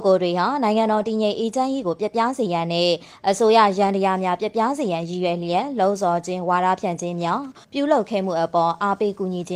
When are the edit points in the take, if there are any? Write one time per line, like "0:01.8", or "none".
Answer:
0:07.6